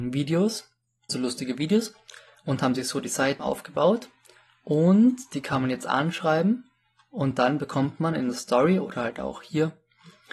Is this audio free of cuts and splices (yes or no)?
no